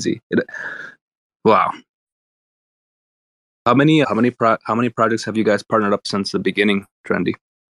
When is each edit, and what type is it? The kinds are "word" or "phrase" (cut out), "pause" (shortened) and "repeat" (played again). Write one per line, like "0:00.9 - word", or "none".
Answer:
0:04.0 - word